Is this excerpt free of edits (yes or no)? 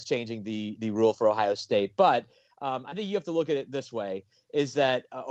yes